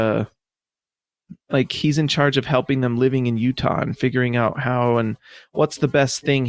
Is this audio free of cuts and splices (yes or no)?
yes